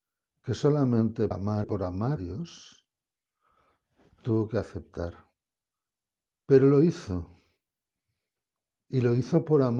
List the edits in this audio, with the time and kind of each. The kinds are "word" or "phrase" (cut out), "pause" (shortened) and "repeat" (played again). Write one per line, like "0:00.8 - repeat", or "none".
0:01.3 - word
0:01.6 - phrase
0:02.2 - word
0:05.9 - pause